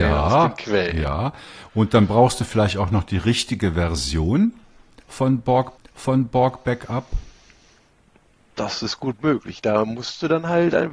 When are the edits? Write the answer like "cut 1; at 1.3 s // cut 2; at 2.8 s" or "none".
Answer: cut 1; at 5.8 s